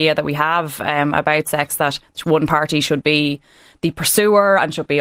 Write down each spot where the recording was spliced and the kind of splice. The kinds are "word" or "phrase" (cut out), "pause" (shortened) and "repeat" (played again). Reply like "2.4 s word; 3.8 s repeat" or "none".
none

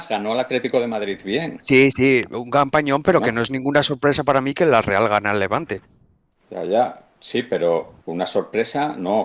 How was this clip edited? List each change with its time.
8.0 s word

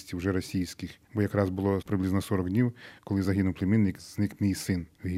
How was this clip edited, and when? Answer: none

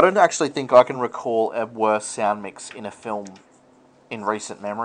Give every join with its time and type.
none

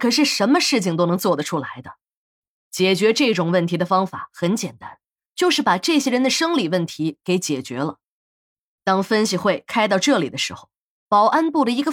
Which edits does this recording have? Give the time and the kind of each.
none

